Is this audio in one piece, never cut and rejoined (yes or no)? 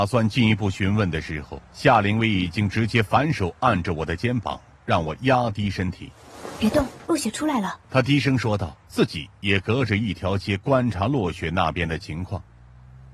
no